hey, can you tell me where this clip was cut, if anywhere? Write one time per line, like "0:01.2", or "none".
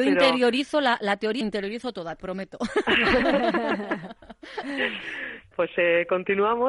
0:01.4
0:02.2
0:05.5